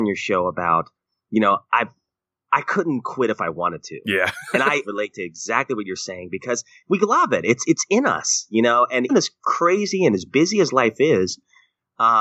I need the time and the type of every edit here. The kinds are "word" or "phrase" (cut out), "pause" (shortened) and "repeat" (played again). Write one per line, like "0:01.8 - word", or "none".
0:04.8 - phrase
0:09.1 - word